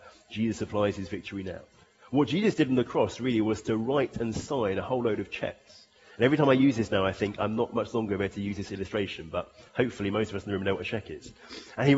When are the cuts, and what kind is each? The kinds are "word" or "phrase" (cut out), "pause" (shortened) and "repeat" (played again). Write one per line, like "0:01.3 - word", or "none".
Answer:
none